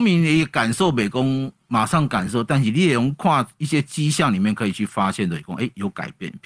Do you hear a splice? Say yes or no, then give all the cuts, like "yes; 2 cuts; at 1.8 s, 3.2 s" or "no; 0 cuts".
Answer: no; 0 cuts